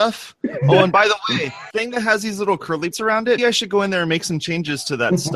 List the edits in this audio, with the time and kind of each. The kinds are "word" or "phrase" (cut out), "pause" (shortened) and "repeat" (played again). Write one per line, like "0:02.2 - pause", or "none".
0:01.7 - word
0:02.9 - word
0:03.4 - word